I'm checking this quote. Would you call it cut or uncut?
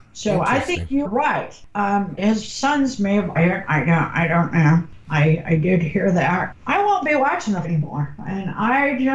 cut